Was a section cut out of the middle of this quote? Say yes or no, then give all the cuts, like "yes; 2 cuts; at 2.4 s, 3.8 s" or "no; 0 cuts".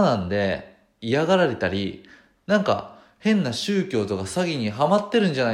no; 0 cuts